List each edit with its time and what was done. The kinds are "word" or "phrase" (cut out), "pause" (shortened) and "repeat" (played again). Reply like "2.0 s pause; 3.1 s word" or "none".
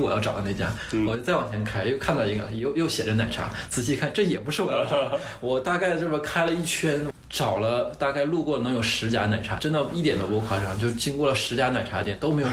9.6 s word